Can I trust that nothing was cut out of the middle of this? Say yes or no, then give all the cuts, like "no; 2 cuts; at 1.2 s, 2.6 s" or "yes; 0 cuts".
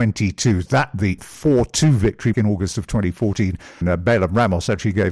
no; 3 cuts; at 1.2 s, 2.3 s, 3.8 s